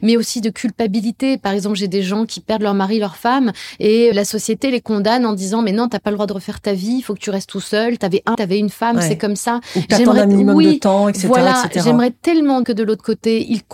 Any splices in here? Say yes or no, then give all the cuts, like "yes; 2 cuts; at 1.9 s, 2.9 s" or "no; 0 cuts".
yes; 3 cuts; at 4.1 s, 8.3 s, 12.6 s